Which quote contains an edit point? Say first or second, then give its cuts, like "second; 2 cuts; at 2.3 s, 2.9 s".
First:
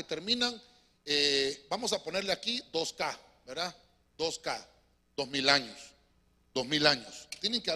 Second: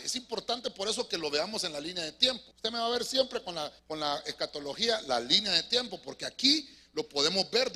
second; 2 cuts; at 2.5 s, 3.8 s